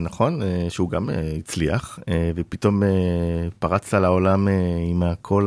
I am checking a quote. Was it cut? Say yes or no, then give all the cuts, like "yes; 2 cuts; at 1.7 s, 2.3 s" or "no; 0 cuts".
no; 0 cuts